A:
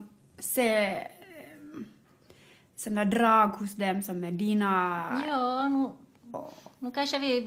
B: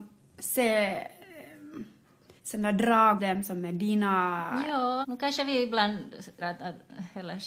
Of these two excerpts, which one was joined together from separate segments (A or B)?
B